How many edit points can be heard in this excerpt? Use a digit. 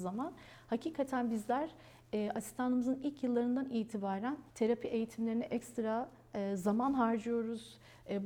1